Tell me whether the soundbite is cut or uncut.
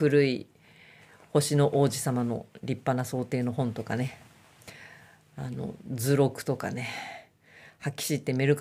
uncut